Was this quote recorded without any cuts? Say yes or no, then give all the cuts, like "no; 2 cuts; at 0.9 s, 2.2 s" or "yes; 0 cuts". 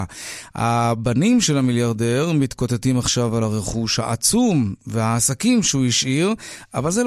yes; 0 cuts